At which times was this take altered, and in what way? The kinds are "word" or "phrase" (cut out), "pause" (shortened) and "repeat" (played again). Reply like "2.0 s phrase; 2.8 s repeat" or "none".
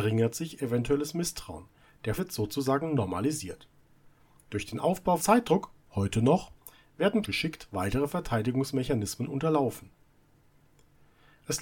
2.2 s word; 5.2 s word; 7.2 s word